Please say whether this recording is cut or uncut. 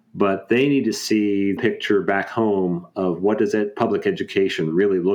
cut